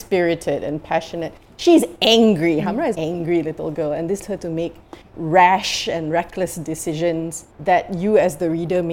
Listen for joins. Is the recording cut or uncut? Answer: cut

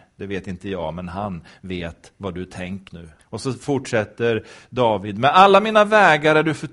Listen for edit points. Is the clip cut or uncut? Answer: cut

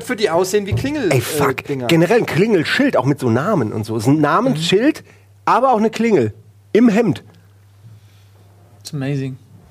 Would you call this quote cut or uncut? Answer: uncut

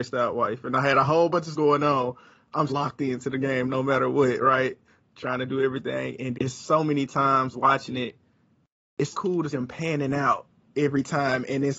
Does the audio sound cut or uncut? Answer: cut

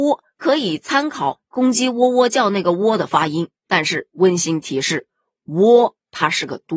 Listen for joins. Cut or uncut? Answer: uncut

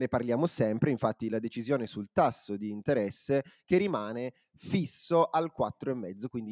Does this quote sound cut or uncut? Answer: uncut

